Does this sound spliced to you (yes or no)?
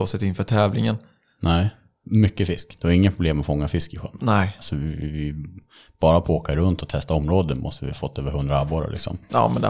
no